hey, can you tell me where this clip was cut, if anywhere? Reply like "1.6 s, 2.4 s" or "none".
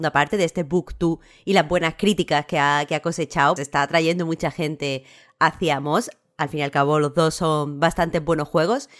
3.6 s